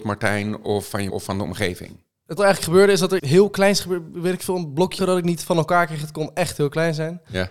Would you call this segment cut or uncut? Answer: cut